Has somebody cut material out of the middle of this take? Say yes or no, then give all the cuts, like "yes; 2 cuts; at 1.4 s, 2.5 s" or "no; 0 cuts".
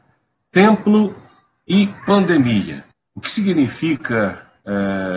yes; 1 cut; at 2.9 s